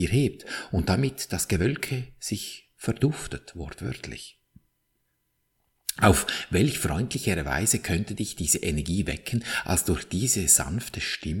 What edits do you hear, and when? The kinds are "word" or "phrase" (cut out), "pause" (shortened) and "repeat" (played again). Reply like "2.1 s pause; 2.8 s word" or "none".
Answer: none